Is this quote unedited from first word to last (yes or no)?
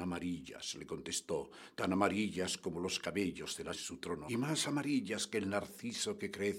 no